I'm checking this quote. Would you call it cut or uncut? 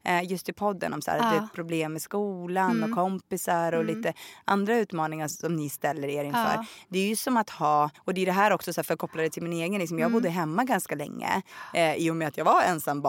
cut